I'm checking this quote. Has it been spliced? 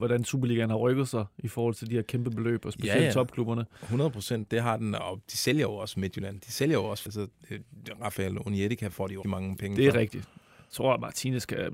yes; 2 cuts; at 7.1 s, 9.2 s

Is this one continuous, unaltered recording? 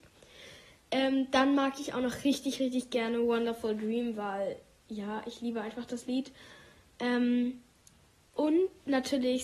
yes; 0 cuts

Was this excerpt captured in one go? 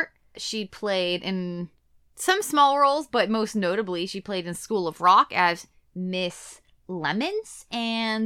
yes; 0 cuts

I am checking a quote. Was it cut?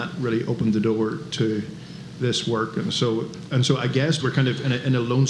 yes; 1 cut; at 4.2 s

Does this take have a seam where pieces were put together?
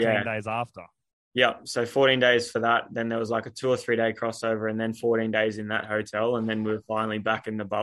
no; 0 cuts

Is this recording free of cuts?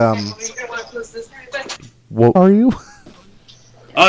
no; 1 cut; at 2.4 s

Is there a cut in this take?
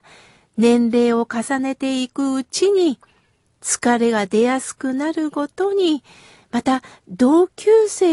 no; 0 cuts

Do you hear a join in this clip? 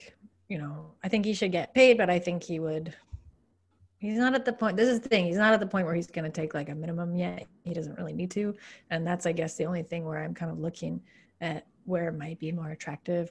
no; 0 cuts

